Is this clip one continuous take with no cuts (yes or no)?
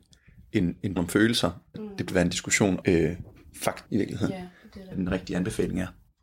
no